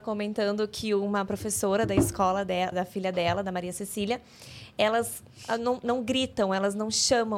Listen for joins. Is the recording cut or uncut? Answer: cut